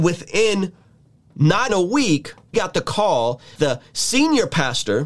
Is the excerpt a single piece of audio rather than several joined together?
no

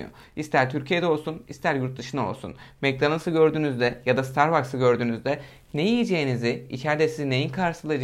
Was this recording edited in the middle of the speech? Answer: no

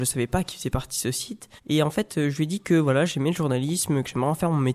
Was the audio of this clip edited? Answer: yes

